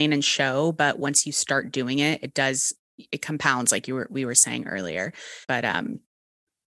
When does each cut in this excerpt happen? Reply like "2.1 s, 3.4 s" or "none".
5.4 s